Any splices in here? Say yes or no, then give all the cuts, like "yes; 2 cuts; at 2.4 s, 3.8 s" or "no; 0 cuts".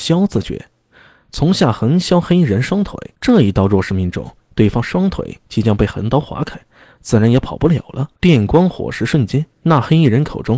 yes; 3 cuts; at 3.1 s, 8.2 s, 9.5 s